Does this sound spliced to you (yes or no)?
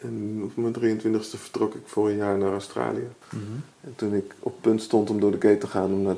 yes